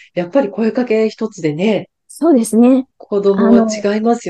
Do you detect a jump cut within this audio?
yes; 2 cuts; at 2.0 s, 2.9 s

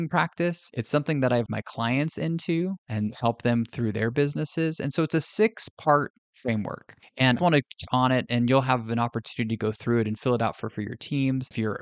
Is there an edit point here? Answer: yes; 4 cuts; at 1.5 s, 7.4 s, 7.9 s, 10.6 s

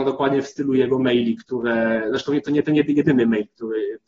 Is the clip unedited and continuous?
yes; 0 cuts

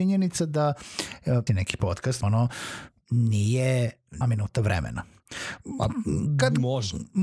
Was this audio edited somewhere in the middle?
yes; 3 cuts; at 1.5 s, 2.2 s, 4.2 s

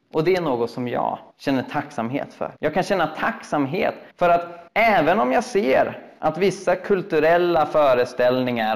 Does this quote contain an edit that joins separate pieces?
yes; 4 cuts; at 1.3 s, 2.6 s, 4.1 s, 4.7 s

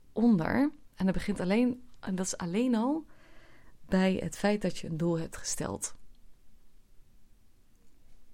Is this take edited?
yes; 1 cut; at 0.9 s

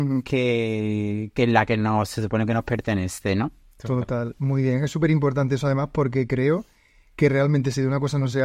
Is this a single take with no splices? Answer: yes; 0 cuts

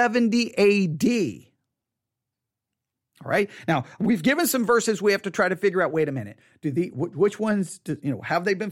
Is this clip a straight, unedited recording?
yes; 0 cuts

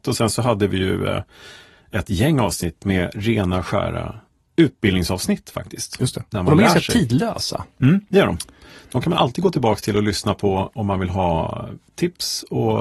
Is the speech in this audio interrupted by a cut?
no; 0 cuts

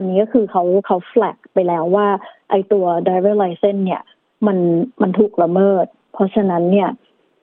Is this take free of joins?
yes; 0 cuts

